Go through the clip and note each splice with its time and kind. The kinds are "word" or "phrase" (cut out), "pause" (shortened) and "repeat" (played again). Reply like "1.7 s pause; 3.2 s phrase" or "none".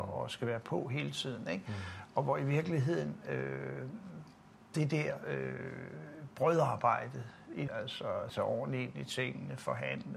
4.7 s pause; 7.7 s phrase; 8.3 s word